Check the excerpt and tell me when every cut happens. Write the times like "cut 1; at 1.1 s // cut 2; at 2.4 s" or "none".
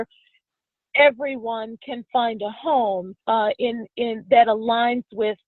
cut 1; at 3.2 s